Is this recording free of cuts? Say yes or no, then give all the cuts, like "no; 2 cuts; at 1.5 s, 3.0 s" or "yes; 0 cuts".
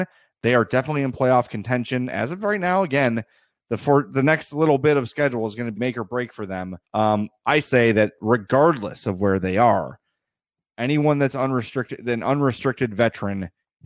no; 3 cuts; at 5.7 s, 6.8 s, 7.6 s